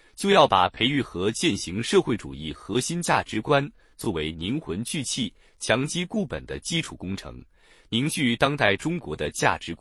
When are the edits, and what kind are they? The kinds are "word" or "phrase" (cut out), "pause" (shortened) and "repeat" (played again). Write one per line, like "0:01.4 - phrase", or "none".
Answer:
none